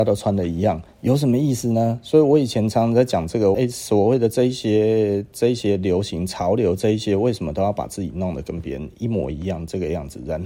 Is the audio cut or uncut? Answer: cut